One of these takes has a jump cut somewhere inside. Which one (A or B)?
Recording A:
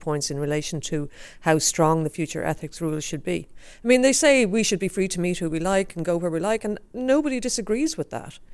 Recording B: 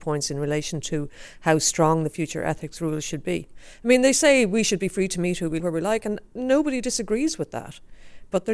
B